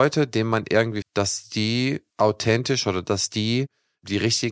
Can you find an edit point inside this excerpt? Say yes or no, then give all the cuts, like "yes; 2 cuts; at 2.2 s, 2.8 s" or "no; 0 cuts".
yes; 2 cuts; at 1.0 s, 2.1 s